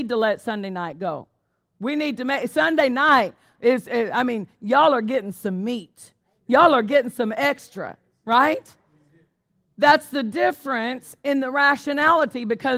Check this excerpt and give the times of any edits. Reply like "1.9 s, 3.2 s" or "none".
none